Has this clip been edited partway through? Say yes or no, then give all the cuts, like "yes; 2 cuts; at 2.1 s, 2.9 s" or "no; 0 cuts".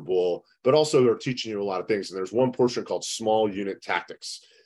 no; 0 cuts